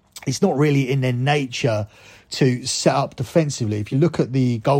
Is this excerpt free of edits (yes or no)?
yes